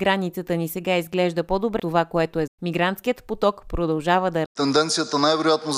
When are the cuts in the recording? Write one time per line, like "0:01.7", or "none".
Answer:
0:01.8
0:02.5
0:04.5